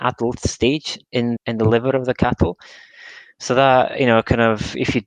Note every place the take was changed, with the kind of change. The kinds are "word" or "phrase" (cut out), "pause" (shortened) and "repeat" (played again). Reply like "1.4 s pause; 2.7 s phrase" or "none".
1.4 s word